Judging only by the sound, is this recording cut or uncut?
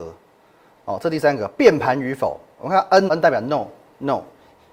cut